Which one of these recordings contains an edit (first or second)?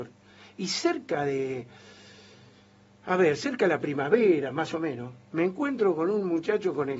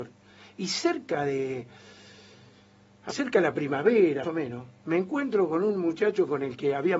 second